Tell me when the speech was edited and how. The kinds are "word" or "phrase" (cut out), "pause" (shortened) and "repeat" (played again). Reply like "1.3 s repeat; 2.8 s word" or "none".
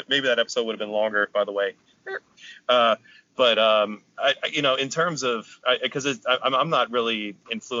none